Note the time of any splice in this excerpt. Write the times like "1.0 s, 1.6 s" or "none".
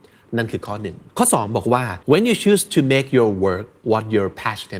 1.1 s, 2.0 s